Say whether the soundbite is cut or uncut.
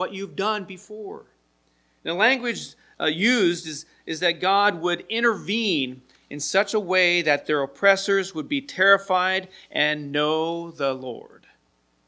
uncut